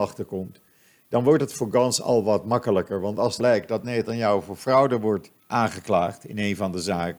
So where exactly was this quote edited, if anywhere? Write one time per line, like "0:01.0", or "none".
0:03.4
0:05.4